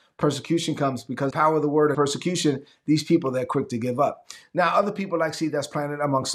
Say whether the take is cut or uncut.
cut